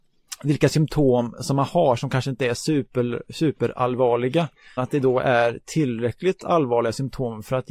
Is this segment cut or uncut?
cut